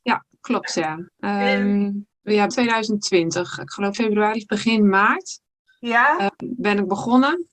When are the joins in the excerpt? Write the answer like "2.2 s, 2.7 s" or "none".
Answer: 2.1 s, 2.5 s, 3.9 s